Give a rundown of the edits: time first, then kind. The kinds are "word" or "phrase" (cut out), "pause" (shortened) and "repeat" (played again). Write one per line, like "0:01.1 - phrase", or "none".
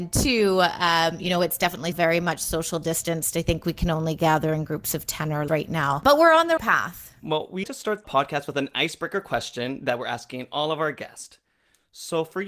0:01.9 - word
0:05.5 - word
0:06.6 - word
0:07.6 - word
0:08.0 - word